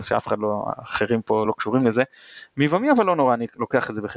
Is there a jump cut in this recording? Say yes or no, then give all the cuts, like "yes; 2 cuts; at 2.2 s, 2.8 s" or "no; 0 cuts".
no; 0 cuts